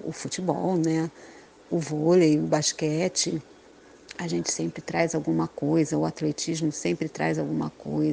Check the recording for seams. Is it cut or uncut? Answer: uncut